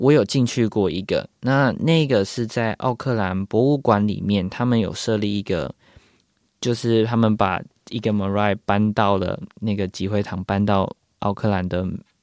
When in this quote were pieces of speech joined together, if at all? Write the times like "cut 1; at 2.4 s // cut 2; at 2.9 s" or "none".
none

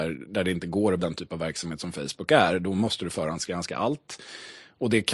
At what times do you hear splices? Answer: cut 1; at 1.0 s

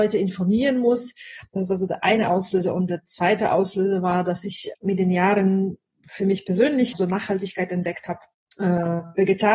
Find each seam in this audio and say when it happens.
cut 1; at 6.9 s // cut 2; at 8.3 s

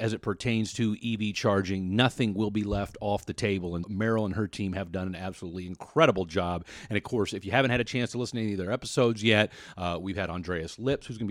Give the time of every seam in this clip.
cut 1; at 3.8 s

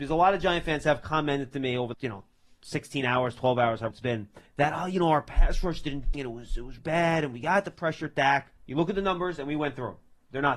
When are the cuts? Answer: cut 1; at 1.9 s // cut 2; at 3.9 s // cut 3; at 4.5 s // cut 4; at 6.1 s // cut 5; at 6.8 s // cut 6; at 8.6 s

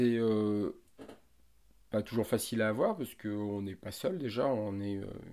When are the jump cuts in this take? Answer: none

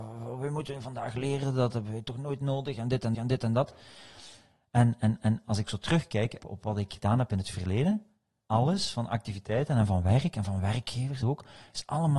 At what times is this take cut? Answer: cut 1; at 3.1 s // cut 2; at 5.2 s // cut 3; at 6.4 s // cut 4; at 8.4 s // cut 5; at 11.2 s

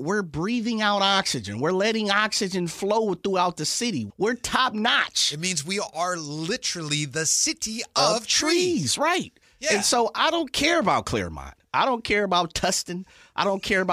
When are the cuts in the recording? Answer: cut 1; at 4.1 s

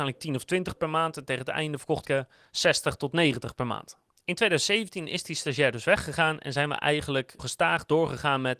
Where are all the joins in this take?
cut 1; at 2.0 s // cut 2; at 7.4 s

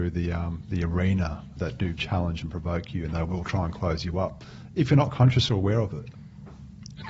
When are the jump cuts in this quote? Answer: cut 1; at 1.6 s

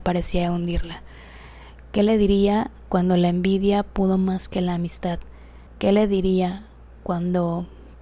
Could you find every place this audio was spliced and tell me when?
cut 1; at 5.7 s

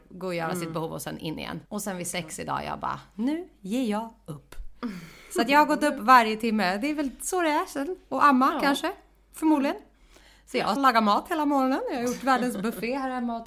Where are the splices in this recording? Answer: cut 1; at 1.7 s // cut 2; at 10.8 s

